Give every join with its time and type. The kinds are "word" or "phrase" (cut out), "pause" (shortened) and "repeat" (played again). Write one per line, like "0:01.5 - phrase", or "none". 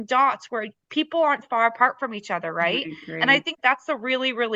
0:01.4 - word